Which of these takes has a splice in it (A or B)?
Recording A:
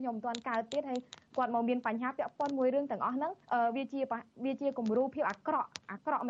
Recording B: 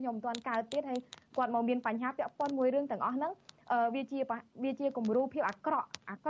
A